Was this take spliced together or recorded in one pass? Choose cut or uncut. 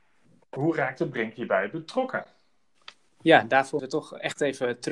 cut